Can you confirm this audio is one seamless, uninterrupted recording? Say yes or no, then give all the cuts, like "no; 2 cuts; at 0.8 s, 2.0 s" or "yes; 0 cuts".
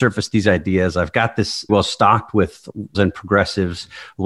no; 2 cuts; at 1.7 s, 2.9 s